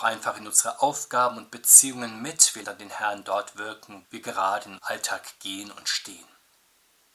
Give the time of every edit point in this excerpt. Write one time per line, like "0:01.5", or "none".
0:02.6
0:04.0
0:04.8